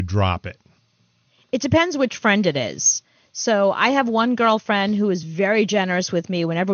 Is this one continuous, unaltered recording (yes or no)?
yes